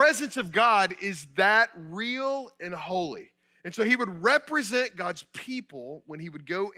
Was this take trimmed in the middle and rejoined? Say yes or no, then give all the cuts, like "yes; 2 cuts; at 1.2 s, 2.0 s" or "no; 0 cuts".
no; 0 cuts